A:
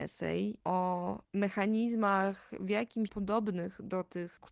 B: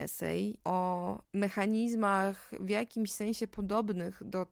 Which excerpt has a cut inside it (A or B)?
A